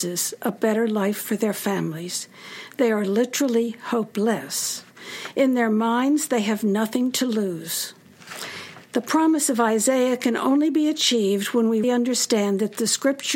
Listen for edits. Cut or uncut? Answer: cut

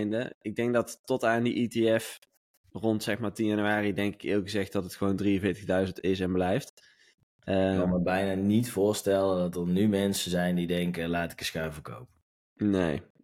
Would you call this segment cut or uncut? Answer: uncut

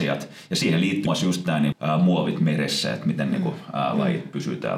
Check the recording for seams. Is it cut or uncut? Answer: cut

